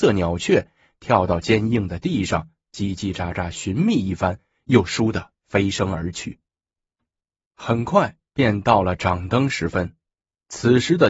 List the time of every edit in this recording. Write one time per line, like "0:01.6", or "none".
none